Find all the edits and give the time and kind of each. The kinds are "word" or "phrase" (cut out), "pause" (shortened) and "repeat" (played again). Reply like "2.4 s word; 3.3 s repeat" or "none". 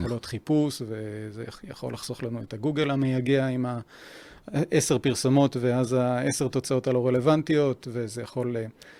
none